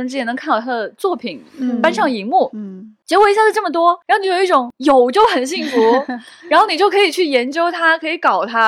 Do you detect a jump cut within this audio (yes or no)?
no